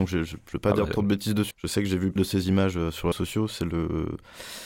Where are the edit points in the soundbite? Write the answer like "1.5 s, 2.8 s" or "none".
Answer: 1.5 s, 2.2 s, 3.1 s